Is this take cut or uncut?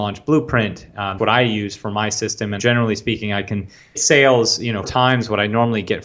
cut